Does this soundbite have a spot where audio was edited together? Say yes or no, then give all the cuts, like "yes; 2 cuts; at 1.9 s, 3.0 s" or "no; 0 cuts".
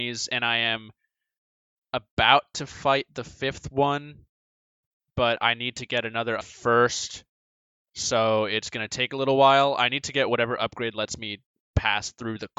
yes; 1 cut; at 6.4 s